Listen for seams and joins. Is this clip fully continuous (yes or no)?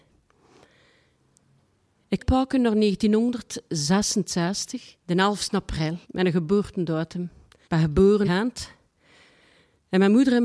no